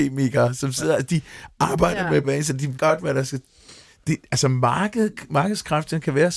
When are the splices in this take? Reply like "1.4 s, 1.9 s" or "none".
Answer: 2.2 s, 2.8 s